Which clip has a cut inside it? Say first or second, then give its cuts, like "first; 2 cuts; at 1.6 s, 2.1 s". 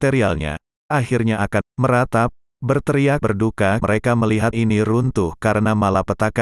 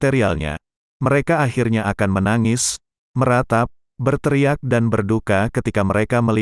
first; 5 cuts; at 0.9 s, 1.6 s, 3.2 s, 3.8 s, 4.5 s